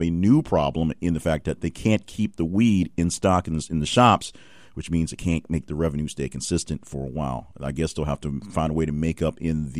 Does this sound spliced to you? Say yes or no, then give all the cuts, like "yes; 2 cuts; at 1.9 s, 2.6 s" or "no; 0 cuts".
no; 0 cuts